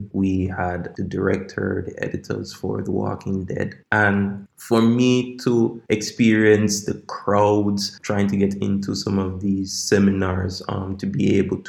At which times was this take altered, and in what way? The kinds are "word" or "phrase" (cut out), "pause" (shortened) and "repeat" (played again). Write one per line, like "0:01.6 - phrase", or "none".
none